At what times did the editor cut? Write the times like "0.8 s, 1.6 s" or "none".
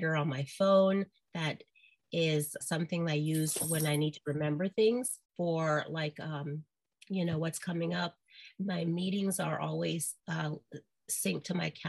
2.6 s, 5.3 s, 10.2 s